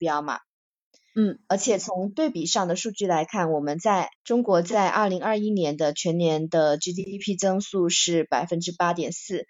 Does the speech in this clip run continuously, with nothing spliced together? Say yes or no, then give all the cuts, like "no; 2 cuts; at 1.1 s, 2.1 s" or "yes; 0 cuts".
no; 1 cut; at 4.2 s